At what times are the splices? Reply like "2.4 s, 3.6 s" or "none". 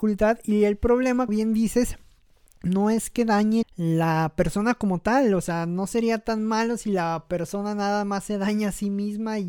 1.3 s, 3.6 s

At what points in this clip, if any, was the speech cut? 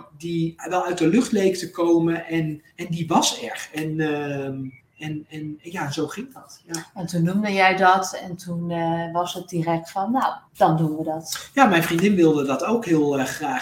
2.7 s, 4.8 s, 10.5 s

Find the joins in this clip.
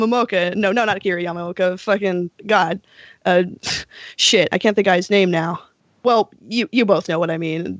2.4 s, 4.8 s, 5.8 s

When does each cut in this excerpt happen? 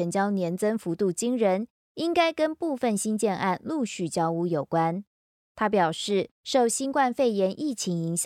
none

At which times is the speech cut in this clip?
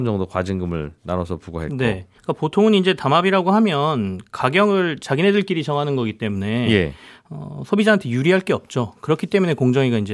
2.2 s

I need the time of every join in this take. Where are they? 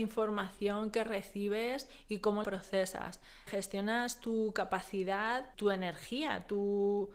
2.4 s, 3.5 s, 5.5 s

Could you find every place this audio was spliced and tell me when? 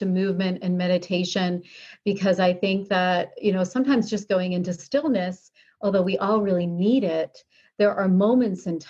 none

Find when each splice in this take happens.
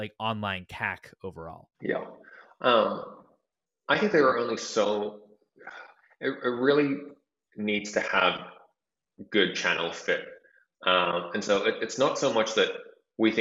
1.7 s

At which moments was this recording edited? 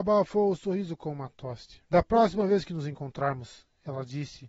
1.9 s

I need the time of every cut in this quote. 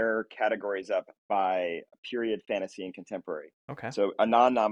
none

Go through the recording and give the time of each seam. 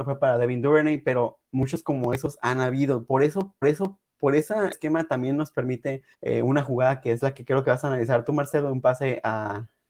3.6 s, 4.7 s, 6.1 s

